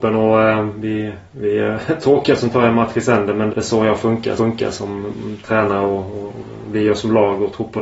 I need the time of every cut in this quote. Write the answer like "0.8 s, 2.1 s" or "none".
3.5 s, 4.4 s